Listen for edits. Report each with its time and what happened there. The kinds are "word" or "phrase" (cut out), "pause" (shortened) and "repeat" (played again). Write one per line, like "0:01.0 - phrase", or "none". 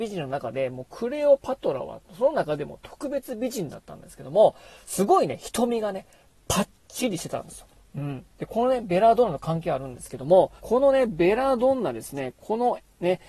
0:10.6 - pause

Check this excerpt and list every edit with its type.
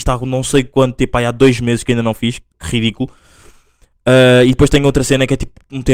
none

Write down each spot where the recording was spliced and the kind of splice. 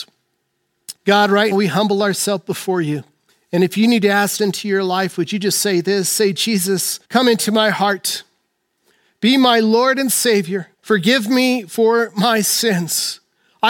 0:01.0 - pause
0:01.5 - word
0:03.3 - pause
0:04.4 - word
0:07.0 - pause
0:10.7 - pause

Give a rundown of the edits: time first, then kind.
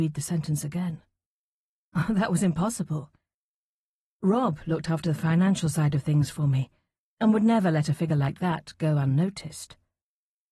none

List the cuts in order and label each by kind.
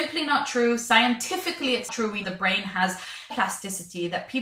0:01.9 - word
0:02.2 - phrase
0:03.3 - word

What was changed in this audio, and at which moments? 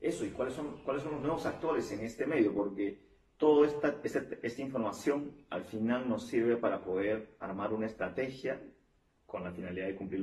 none

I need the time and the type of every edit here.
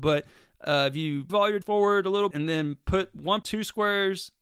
0:01.3 - word
0:01.6 - word
0:02.3 - word
0:03.4 - word

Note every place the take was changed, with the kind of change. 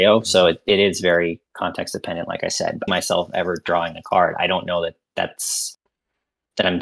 0:02.9 - phrase

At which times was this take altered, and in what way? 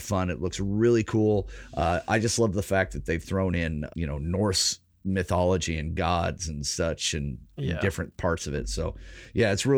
0:03.9 - word

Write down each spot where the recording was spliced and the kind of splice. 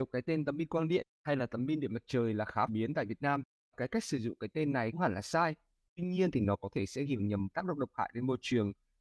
0:02.7 - word
0:03.7 - word
0:04.9 - word
0:07.1 - word
0:07.5 - word

